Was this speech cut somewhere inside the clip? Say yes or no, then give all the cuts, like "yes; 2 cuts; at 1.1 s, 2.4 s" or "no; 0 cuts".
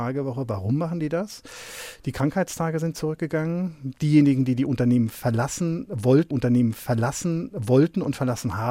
yes; 1 cut; at 6.3 s